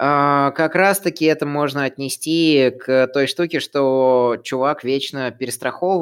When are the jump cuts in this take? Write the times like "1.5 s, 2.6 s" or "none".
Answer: none